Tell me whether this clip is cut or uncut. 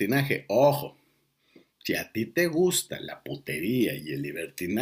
uncut